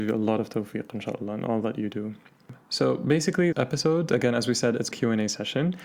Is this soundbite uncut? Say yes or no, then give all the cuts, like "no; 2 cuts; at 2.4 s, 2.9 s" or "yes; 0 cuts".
no; 2 cuts; at 3.5 s, 4.9 s